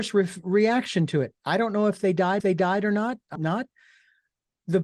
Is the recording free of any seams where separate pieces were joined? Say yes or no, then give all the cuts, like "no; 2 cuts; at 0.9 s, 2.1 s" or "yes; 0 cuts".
no; 2 cuts; at 2.4 s, 3.4 s